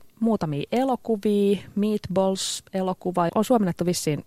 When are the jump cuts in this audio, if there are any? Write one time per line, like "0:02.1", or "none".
0:03.3

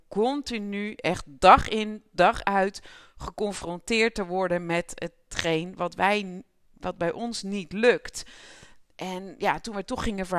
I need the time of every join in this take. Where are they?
none

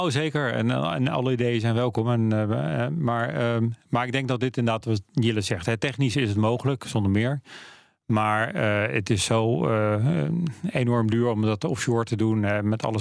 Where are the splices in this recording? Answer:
none

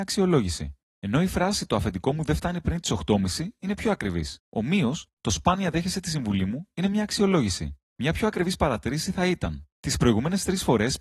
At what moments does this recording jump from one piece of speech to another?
0:04.4

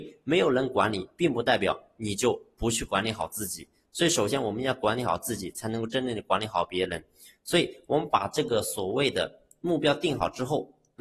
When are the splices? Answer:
none

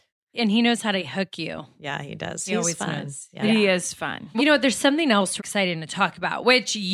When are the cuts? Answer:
0:04.4
0:05.4

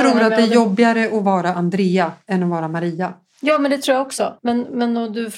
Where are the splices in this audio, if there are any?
0:04.4

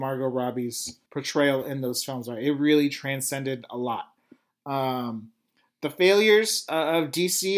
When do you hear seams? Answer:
0:01.1

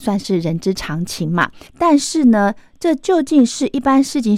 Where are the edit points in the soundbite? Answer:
0:01.7

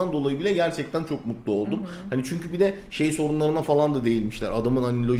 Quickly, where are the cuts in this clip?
none

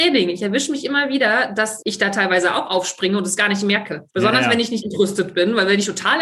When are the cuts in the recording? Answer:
0:01.8
0:04.1
0:04.8

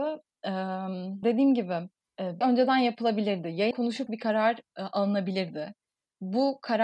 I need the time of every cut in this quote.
0:01.2
0:02.4
0:03.7
0:04.1

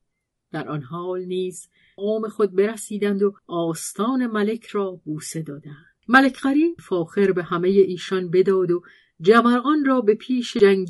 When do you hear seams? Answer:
0:02.0
0:03.4
0:06.0
0:06.8

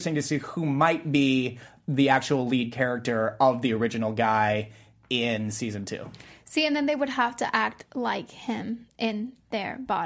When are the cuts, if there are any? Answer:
none

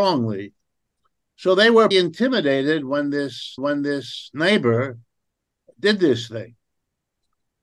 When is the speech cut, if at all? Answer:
0:01.9
0:03.6

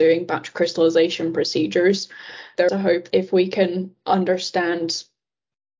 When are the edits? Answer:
0:02.7
0:03.1

